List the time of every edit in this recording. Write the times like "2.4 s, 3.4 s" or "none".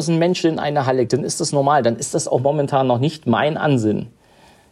1.1 s